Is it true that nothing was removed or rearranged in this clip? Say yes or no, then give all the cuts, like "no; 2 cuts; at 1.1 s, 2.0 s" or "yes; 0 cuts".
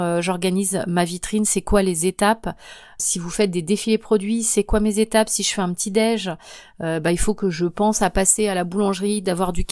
yes; 0 cuts